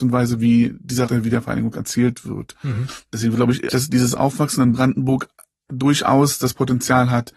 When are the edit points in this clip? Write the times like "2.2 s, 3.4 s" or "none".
1.1 s, 3.7 s